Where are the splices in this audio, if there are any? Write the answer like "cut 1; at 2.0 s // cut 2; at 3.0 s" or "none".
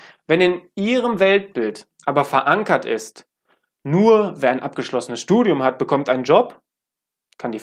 none